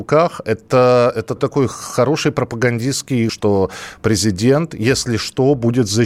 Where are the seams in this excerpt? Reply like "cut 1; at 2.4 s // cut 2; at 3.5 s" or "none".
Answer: cut 1; at 1.4 s // cut 2; at 3.3 s